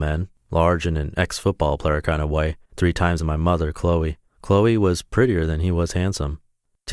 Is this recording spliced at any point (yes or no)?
yes